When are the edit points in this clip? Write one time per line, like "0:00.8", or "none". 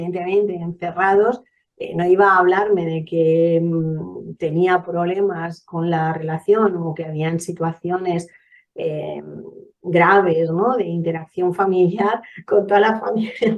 none

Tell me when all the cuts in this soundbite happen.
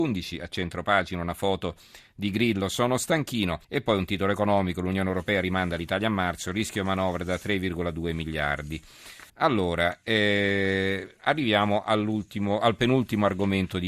0:03.6
0:09.3

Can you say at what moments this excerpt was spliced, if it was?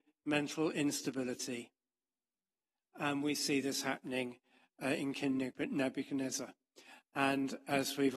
none

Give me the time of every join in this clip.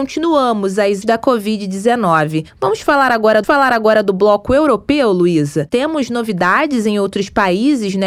0:01.0
0:03.4

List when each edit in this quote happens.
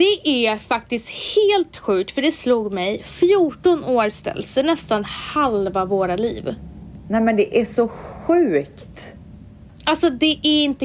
none

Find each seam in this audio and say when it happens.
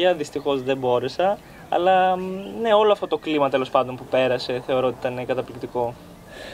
none

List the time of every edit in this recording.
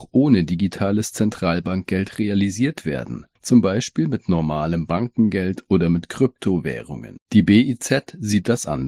0:03.4
0:07.2

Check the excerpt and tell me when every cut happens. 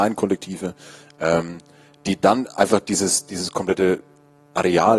none

